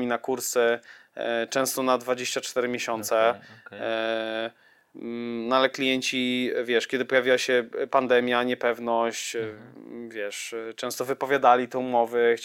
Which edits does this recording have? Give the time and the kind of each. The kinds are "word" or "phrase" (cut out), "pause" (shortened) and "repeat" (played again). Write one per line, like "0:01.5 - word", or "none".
none

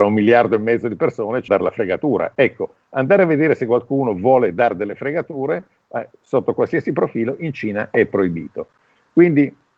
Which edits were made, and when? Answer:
0:01.5 - phrase

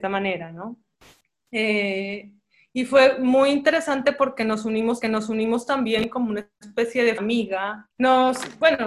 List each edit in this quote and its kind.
0:05.0 - repeat
0:07.2 - word

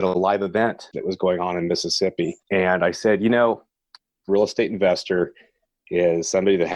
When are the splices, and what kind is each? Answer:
0:00.9 - word
0:02.4 - pause
0:04.3 - phrase

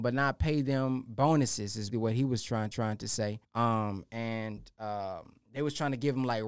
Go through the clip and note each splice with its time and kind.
0:01.9 - word
0:02.7 - repeat
0:03.4 - pause

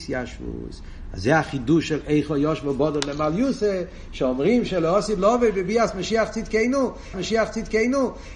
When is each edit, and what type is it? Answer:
0:07.1 - repeat

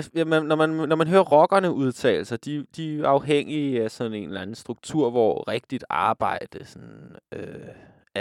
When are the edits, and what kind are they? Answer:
none

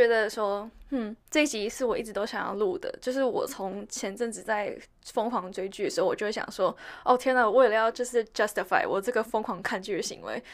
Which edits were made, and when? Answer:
0:01.2 - pause

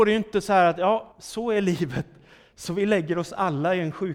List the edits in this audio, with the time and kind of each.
0:01.1 - pause

